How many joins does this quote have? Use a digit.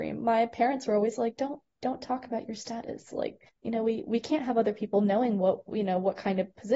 1